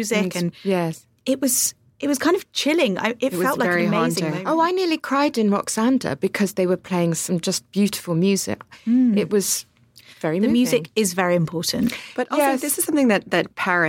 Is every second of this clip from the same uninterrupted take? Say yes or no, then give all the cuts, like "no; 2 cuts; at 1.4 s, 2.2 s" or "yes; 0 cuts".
yes; 0 cuts